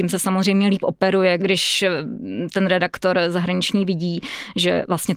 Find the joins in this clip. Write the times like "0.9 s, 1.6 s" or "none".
1.4 s